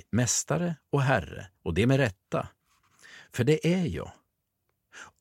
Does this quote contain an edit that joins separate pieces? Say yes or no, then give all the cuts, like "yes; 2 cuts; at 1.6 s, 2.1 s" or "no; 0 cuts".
yes; 1 cut; at 1.6 s